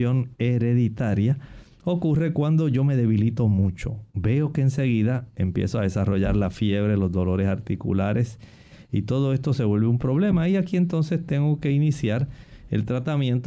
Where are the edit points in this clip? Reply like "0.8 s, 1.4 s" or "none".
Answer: 4.1 s